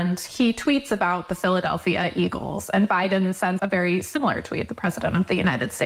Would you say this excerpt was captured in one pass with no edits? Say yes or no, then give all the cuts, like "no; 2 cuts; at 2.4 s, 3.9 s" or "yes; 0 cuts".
no; 1 cut; at 3.6 s